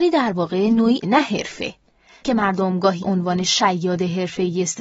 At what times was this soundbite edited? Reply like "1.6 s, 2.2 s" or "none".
1.0 s, 2.2 s, 3.0 s